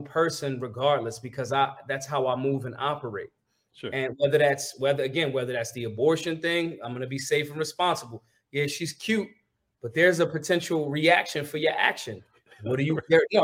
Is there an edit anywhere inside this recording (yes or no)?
no